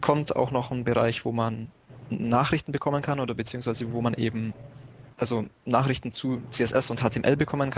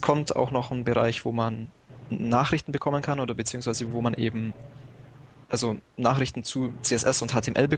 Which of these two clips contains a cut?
first; 1 cut; at 5.1 s

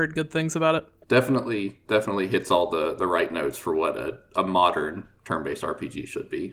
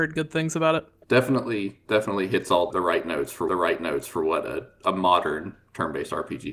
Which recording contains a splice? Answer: second; 2 cuts; at 2.7 s, 3.5 s

